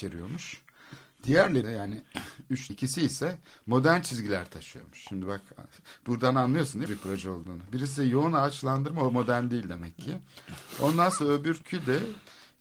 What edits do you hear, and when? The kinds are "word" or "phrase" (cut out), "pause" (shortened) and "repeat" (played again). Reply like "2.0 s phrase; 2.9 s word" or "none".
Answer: 1.6 s word; 2.7 s word; 6.9 s phrase